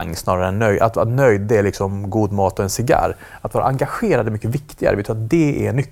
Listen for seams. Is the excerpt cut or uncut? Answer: uncut